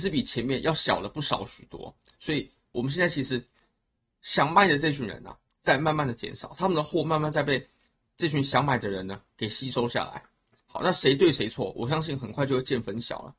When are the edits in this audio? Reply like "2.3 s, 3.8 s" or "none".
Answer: none